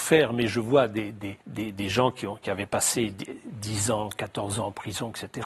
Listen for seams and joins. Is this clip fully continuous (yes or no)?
no